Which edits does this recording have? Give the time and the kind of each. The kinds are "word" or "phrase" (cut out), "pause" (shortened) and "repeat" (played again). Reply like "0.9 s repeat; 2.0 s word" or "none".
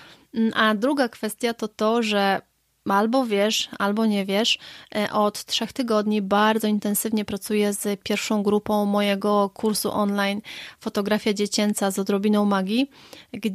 none